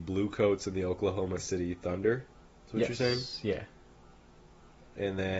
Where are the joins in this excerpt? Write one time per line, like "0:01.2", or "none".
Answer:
none